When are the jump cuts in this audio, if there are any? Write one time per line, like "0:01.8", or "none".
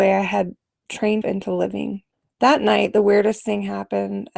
0:01.2
0:02.1